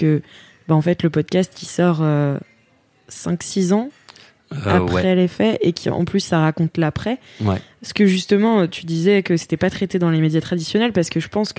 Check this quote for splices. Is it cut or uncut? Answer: uncut